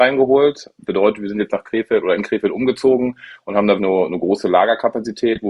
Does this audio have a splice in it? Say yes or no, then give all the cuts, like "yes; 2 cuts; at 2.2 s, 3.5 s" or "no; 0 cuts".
yes; 1 cut; at 3.8 s